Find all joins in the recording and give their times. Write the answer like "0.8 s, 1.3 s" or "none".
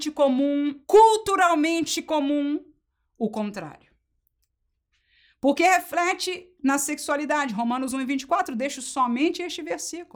none